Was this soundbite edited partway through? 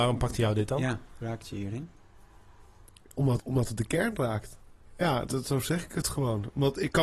yes; 3 cuts; at 1.2 s, 3.4 s, 5.3 s

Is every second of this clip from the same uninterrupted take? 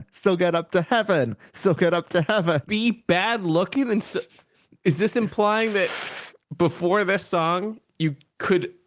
yes; 0 cuts

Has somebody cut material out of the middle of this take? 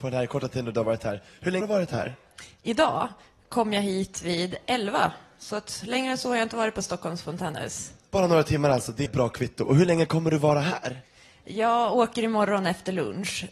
yes; 2 cuts; at 1.6 s, 9.1 s

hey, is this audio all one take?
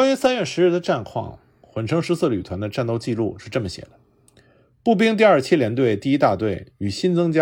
yes; 0 cuts

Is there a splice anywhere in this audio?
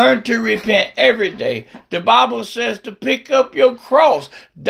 no; 0 cuts

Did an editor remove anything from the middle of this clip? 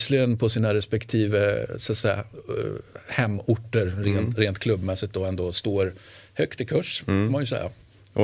no; 0 cuts

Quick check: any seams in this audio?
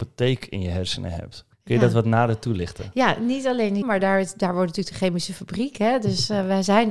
yes; 2 cuts; at 1.5 s, 3.8 s

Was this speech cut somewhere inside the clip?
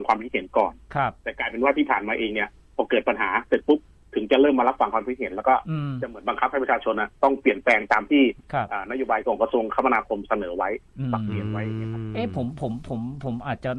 no; 0 cuts

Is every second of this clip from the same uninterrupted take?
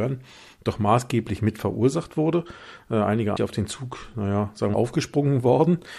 no; 2 cuts; at 3.3 s, 4.7 s

